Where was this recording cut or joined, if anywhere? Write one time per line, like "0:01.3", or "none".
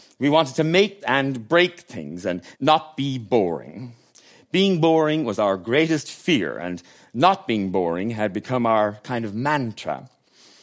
0:01.0
0:02.5